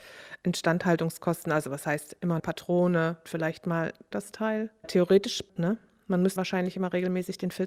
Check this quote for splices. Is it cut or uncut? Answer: cut